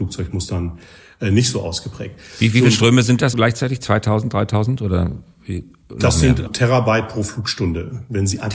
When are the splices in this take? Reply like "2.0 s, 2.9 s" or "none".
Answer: 3.3 s, 6.5 s